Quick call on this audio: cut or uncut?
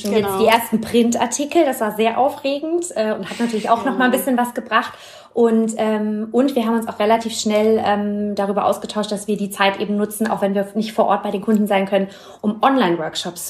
uncut